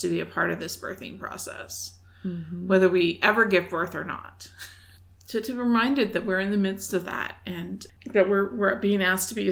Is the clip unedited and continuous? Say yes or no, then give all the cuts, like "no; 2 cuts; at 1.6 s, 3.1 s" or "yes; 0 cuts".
yes; 0 cuts